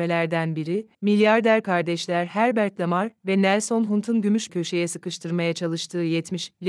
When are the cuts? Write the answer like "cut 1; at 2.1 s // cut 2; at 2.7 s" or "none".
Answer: cut 1; at 0.9 s // cut 2; at 4.5 s